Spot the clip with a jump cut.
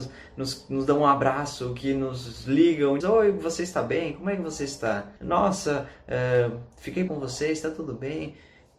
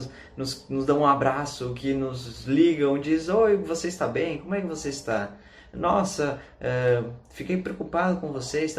first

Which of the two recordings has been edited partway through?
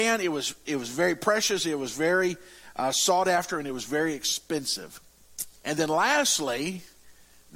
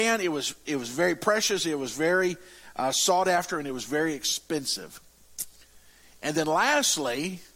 first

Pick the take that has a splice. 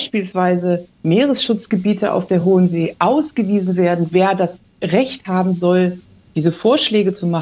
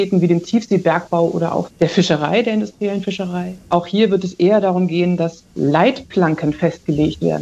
second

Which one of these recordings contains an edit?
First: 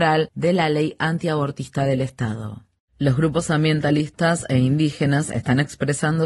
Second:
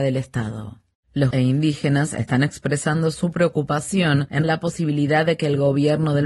second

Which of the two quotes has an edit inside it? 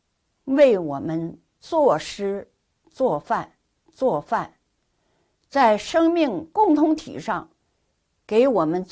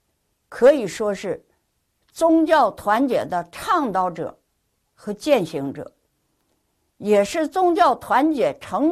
first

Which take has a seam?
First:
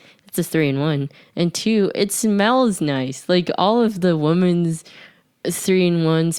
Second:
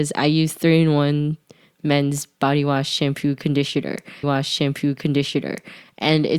second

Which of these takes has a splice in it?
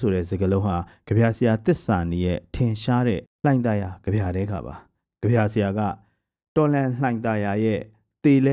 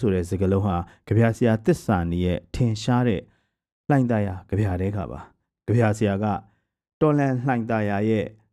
first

